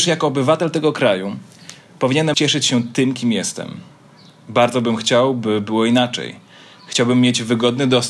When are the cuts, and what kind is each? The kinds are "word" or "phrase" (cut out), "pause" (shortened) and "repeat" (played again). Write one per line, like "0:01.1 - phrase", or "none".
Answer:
0:02.3 - word